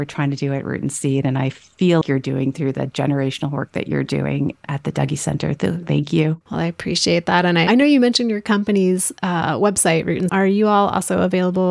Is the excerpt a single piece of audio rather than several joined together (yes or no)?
no